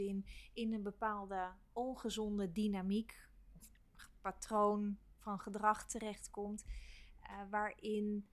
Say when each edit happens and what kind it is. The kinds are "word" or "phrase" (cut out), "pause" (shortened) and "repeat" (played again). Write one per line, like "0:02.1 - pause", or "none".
none